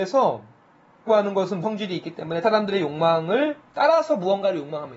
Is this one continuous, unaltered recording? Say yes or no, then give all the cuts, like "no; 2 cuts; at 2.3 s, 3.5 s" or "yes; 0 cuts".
no; 3 cuts; at 1.1 s, 1.6 s, 2.4 s